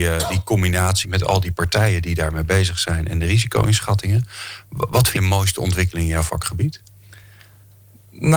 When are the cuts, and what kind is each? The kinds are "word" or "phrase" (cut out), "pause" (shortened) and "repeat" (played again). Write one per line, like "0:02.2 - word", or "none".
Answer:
0:01.0 - word
0:05.2 - word

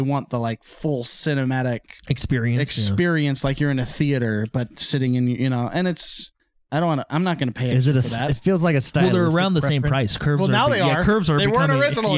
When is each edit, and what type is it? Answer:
0:02.0 - pause
0:06.4 - pause

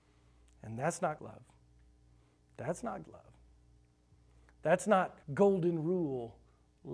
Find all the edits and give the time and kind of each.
0:01.2 - phrase
0:03.0 - word
0:05.2 - pause

